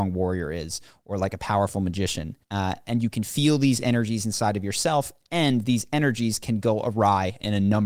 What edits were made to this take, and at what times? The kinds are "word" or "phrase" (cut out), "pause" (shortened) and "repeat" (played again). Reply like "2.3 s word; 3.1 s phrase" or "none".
2.4 s pause